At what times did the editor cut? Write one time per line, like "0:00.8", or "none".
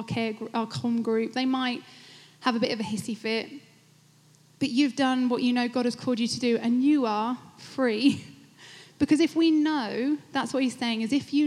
none